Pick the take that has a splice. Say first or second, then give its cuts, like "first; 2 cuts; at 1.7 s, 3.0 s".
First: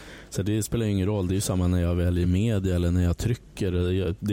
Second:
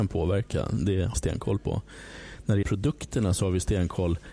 second; 2 cuts; at 1.1 s, 2.6 s